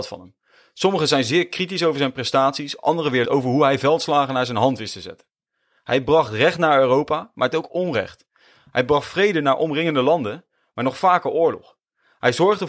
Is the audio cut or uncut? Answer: cut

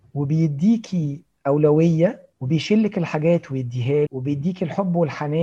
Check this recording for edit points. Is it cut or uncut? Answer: cut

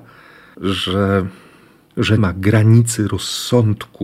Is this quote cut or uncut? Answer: cut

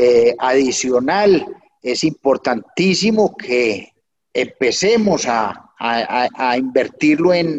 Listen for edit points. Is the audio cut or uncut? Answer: uncut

